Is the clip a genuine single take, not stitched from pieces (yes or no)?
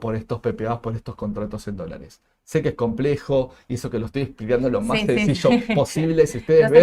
yes